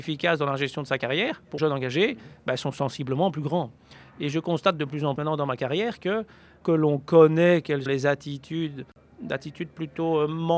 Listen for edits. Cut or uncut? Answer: cut